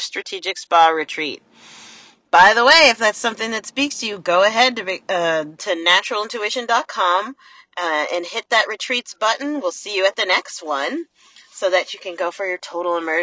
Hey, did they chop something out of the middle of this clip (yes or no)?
no